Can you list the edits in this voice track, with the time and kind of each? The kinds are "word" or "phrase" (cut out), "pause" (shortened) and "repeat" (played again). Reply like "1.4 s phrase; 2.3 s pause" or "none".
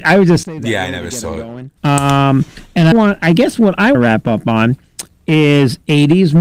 1.8 s pause; 2.9 s word; 3.9 s word